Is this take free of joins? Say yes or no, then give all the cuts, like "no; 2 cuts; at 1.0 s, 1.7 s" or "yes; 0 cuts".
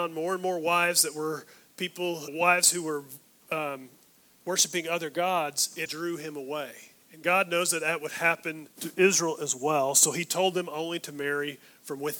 no; 4 cuts; at 2.3 s, 4.3 s, 5.9 s, 8.7 s